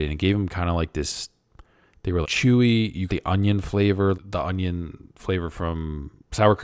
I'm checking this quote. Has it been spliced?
yes; 3 cuts; at 2.2 s, 3.1 s, 4.1 s

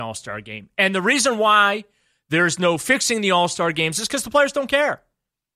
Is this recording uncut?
yes; 0 cuts

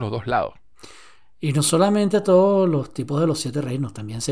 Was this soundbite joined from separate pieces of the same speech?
no; 0 cuts

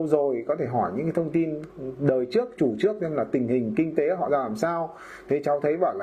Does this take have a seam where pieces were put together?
no; 0 cuts

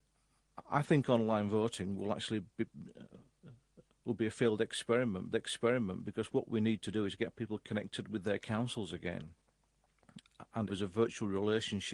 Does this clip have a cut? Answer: yes; 3 cuts; at 2.5 s, 5.3 s, 10.7 s

